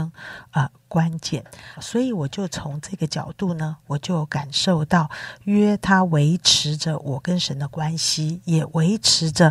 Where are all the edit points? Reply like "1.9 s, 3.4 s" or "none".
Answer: 1.8 s